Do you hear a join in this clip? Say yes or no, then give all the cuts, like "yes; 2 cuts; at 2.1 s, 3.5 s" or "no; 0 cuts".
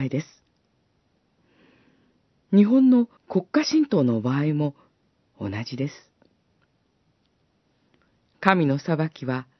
yes; 1 cut; at 3.2 s